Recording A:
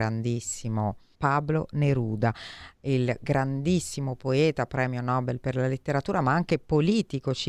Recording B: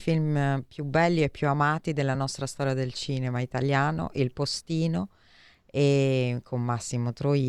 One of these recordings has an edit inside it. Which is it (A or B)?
A